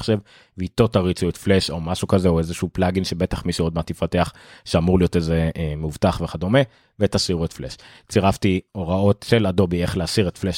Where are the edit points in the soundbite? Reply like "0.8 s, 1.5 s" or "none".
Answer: none